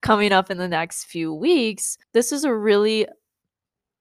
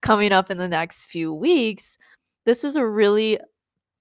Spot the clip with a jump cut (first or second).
first